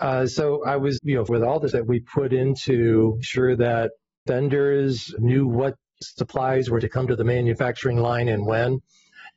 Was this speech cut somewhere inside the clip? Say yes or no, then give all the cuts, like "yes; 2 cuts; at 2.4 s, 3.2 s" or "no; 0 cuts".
yes; 8 cuts; at 1.0 s, 1.3 s, 1.7 s, 3.2 s, 4.3 s, 5.2 s, 6.0 s, 6.8 s